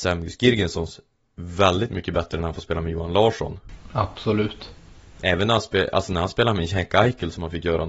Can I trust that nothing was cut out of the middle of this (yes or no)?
yes